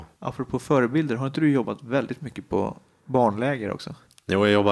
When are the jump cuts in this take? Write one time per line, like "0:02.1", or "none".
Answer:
none